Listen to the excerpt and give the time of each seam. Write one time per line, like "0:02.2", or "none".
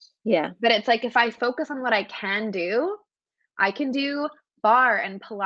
none